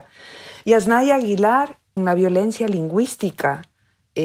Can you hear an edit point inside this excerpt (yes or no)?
yes